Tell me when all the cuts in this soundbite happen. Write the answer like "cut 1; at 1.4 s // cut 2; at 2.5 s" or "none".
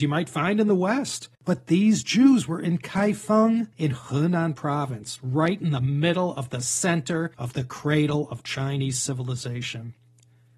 cut 1; at 1.3 s // cut 2; at 3.7 s // cut 3; at 7.3 s